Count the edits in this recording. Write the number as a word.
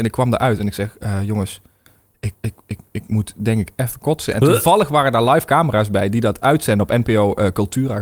one